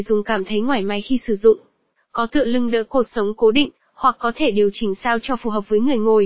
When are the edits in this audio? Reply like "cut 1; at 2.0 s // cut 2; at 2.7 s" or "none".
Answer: none